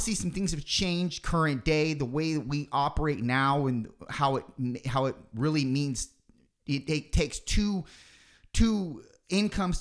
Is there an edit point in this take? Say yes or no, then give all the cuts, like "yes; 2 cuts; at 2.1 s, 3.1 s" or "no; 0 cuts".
no; 0 cuts